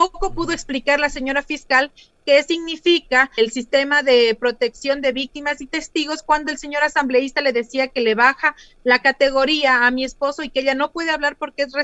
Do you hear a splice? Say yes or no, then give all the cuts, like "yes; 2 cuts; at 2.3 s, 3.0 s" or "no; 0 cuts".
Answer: yes; 1 cut; at 3.4 s